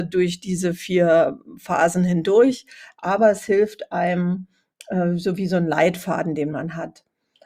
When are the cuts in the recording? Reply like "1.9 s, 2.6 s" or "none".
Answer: none